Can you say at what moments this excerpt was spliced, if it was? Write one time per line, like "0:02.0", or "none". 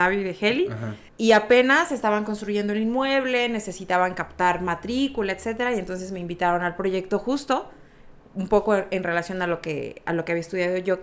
0:01.1